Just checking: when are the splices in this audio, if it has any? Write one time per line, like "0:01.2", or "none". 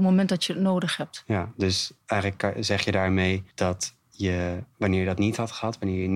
0:02.0
0:03.5